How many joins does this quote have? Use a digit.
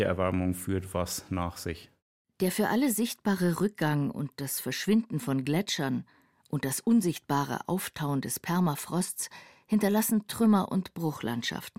0